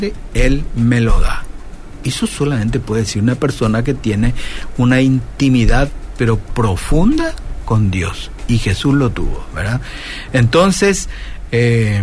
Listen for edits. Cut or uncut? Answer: uncut